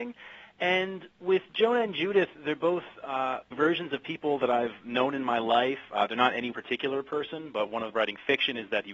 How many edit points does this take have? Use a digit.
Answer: 4